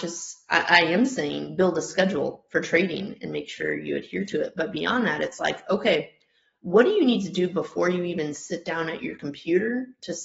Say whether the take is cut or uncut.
uncut